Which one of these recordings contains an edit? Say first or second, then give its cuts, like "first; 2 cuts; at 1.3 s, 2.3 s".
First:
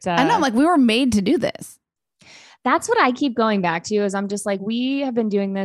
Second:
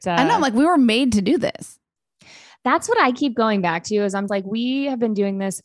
second; 1 cut; at 4.3 s